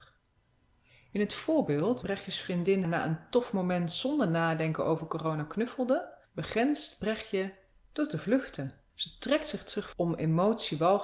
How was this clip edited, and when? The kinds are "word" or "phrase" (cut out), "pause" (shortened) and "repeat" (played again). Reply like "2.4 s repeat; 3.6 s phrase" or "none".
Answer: 2.0 s word; 2.8 s word; 6.3 s pause; 8.9 s pause; 9.9 s phrase